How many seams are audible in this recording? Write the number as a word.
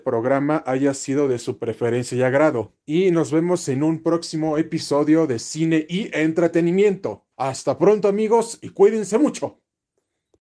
two